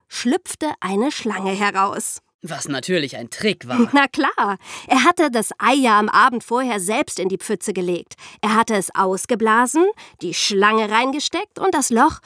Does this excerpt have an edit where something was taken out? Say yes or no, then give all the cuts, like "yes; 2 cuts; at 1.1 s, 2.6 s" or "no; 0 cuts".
no; 0 cuts